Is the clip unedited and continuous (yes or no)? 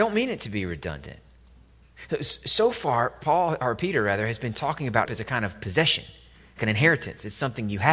no